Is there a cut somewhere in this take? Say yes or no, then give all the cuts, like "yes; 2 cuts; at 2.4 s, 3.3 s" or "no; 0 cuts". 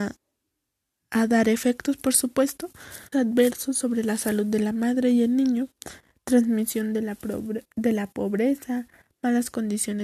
yes; 1 cut; at 3.1 s